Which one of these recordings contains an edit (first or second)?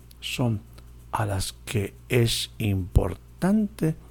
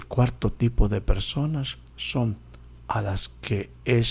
second